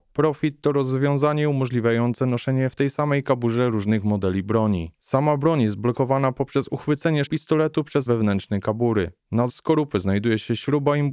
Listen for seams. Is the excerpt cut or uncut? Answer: cut